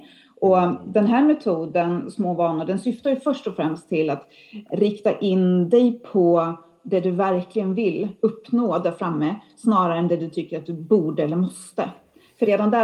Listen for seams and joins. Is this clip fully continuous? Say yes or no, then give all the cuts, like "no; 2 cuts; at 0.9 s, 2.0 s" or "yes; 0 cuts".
yes; 0 cuts